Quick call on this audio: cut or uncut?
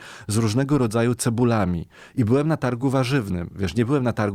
uncut